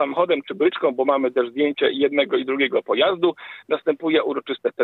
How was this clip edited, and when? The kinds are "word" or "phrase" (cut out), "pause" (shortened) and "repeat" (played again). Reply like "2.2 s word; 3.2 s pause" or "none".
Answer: none